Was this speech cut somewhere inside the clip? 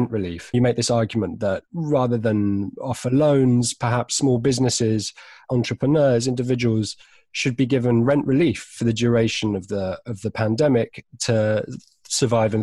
no; 0 cuts

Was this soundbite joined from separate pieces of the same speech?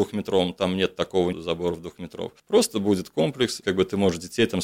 yes; 3 cuts; at 1.3 s, 2.4 s, 3.6 s

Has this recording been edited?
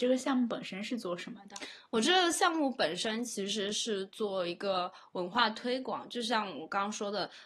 no; 0 cuts

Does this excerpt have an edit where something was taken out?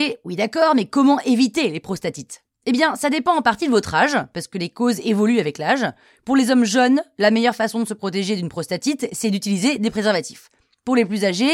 no; 0 cuts

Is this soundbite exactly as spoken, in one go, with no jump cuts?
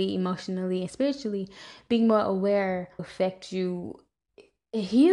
no; 1 cut; at 3.0 s

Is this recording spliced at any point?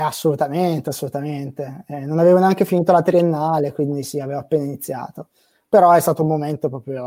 no; 0 cuts

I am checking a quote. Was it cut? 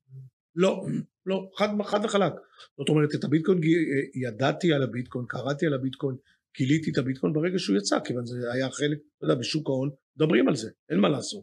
no; 0 cuts

